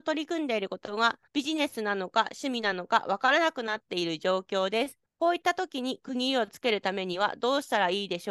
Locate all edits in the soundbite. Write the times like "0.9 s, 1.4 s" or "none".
1.3 s, 5.1 s